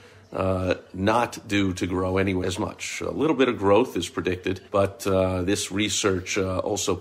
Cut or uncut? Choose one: cut